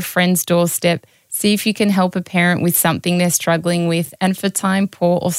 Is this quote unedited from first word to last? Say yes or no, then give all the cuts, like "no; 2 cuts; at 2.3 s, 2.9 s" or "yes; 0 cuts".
yes; 0 cuts